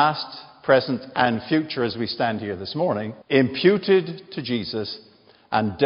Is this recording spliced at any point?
yes; 1 cut; at 3.2 s

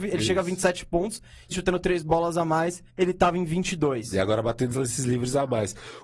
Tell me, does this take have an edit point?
yes; 3 cuts; at 1.5 s, 2.9 s, 4.7 s

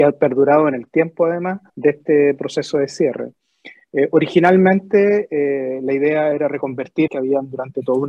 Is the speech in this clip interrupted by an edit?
yes; 2 cuts; at 1.7 s, 7.1 s

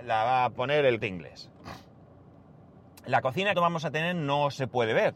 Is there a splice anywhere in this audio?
yes; 2 cuts; at 1.0 s, 3.5 s

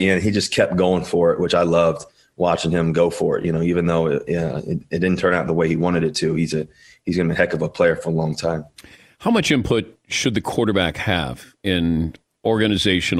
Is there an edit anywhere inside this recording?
no; 0 cuts

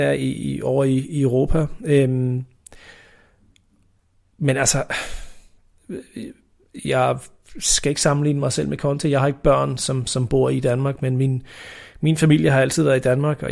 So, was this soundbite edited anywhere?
no; 0 cuts

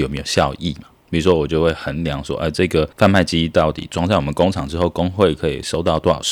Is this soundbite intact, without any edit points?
no; 1 cut; at 2.9 s

